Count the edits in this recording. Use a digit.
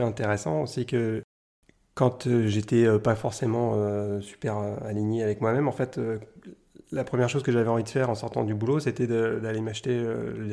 0